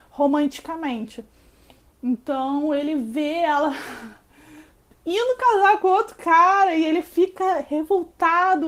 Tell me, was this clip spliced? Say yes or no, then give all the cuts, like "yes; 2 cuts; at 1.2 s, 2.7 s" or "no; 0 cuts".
no; 0 cuts